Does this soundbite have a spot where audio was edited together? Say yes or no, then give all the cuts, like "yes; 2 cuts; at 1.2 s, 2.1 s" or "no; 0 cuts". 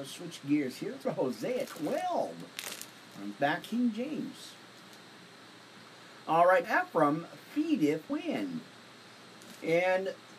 yes; 5 cuts; at 1.0 s, 1.7 s, 3.6 s, 6.6 s, 8.1 s